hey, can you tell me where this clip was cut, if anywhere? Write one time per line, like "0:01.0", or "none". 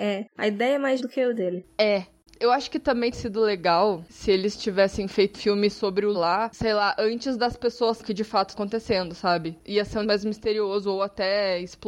0:01.0
0:01.3
0:03.1
0:05.3
0:06.1
0:08.0
0:08.5
0:10.0